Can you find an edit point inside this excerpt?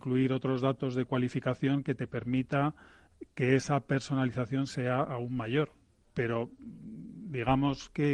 no; 0 cuts

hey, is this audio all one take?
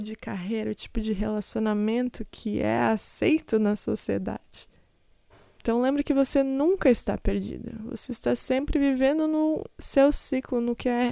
yes; 0 cuts

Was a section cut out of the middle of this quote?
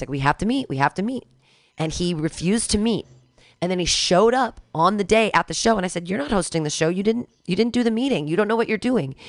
no; 0 cuts

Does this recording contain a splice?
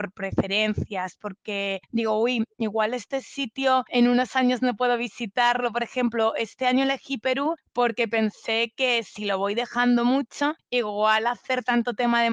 yes; 1 cut; at 3.9 s

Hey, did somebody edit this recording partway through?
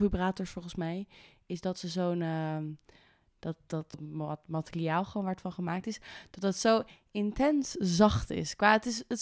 no; 0 cuts

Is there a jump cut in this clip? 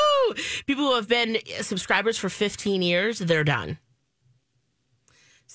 no; 0 cuts

